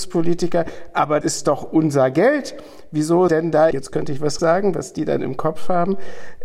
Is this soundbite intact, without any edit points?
no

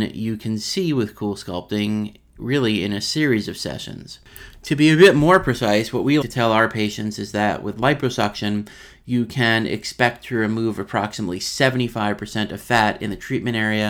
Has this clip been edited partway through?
yes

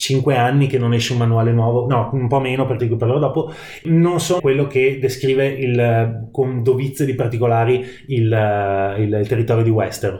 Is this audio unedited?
no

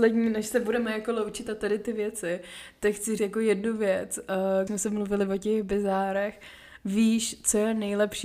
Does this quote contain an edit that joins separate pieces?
yes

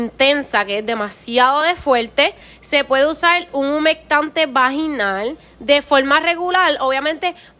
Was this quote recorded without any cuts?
yes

